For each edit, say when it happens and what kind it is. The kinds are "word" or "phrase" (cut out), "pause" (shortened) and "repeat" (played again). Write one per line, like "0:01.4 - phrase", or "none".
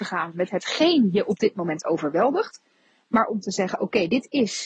none